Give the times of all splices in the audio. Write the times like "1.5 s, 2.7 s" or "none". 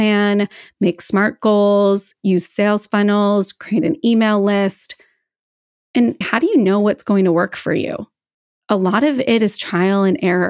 6.2 s, 8.3 s